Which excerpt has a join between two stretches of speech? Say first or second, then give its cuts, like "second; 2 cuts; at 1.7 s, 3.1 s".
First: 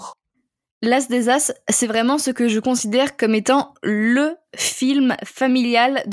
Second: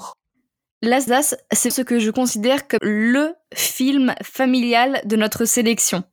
second; 3 cuts; at 1.1 s, 1.7 s, 2.8 s